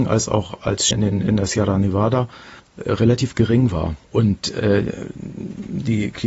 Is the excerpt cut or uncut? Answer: cut